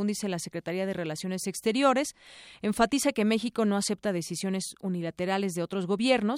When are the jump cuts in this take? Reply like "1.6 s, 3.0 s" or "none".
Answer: none